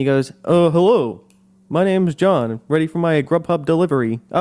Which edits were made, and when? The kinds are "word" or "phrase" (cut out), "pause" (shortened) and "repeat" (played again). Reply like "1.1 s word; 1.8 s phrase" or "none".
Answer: none